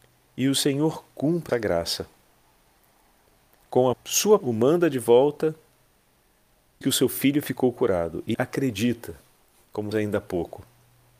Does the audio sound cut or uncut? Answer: cut